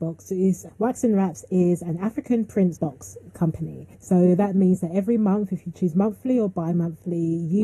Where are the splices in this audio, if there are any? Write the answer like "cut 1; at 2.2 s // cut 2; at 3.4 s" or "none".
cut 1; at 2.8 s // cut 2; at 3.9 s